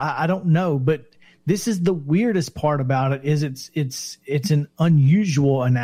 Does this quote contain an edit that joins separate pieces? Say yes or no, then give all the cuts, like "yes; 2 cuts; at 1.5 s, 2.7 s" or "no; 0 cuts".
no; 0 cuts